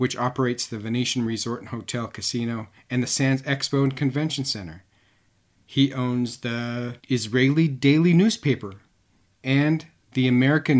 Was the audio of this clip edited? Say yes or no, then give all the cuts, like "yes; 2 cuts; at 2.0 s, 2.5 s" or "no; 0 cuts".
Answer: no; 0 cuts